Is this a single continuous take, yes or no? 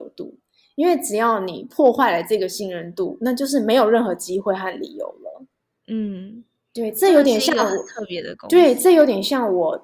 no